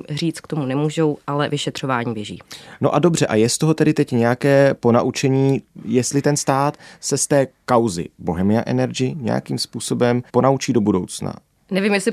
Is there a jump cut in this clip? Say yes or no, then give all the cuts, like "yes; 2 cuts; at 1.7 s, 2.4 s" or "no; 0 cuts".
yes; 1 cut; at 10.3 s